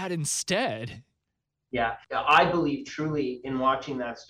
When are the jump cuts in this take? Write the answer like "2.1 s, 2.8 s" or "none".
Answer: 2.0 s